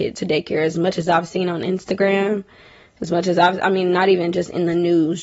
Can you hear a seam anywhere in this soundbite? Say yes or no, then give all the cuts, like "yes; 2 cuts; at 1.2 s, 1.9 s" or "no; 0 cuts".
no; 0 cuts